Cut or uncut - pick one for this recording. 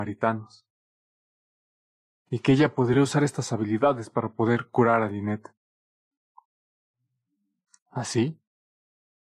uncut